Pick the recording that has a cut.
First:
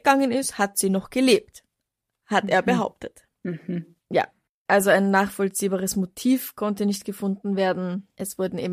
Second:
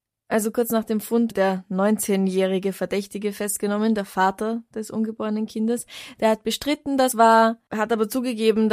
second; 2 cuts; at 1.3 s, 7.1 s

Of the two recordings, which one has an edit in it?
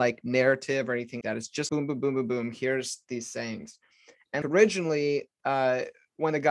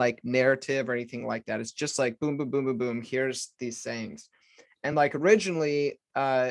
first; 3 cuts; at 1.2 s, 1.7 s, 4.4 s

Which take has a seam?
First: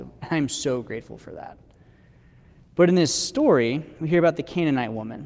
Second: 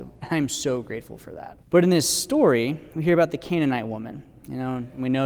second; 1 cut; at 1.6 s

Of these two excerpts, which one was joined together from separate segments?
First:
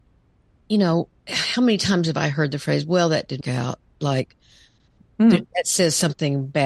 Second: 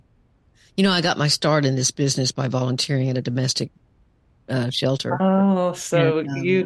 first; 1 cut; at 3.4 s

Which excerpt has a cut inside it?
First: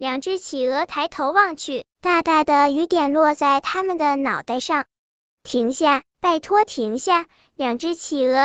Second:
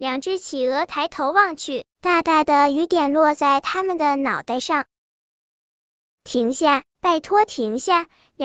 first; 1 cut; at 5.0 s

